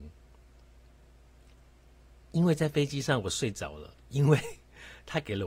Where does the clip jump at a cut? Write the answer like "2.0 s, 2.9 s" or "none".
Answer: 4.0 s